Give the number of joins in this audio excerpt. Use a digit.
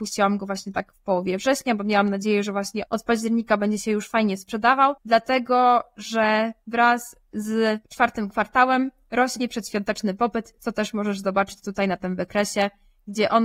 2